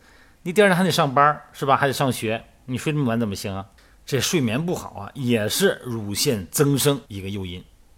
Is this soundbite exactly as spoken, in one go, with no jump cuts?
no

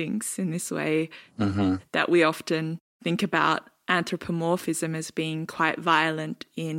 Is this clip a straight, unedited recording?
yes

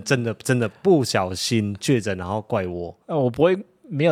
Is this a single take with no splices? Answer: no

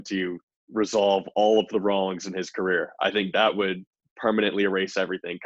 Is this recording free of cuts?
yes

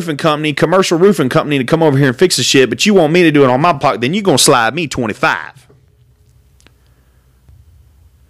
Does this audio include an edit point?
no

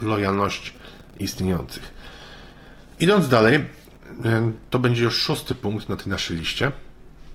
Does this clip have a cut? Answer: no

